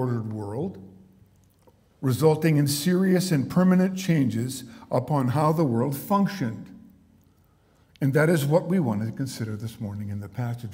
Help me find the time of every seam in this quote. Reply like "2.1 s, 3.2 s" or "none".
none